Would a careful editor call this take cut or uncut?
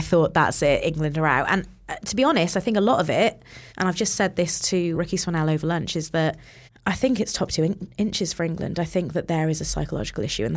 cut